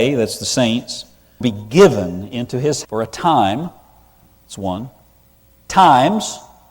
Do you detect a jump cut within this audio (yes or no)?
yes